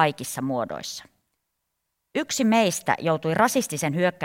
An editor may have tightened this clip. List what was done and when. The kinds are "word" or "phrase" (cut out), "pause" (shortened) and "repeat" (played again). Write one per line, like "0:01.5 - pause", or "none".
none